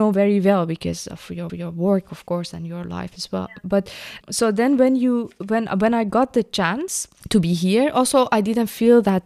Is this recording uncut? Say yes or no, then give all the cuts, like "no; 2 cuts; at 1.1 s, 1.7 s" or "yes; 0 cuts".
no; 2 cuts; at 1.5 s, 4.2 s